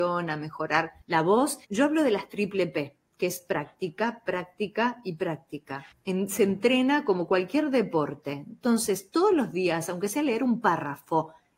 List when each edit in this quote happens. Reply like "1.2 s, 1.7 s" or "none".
1.0 s, 1.6 s, 5.9 s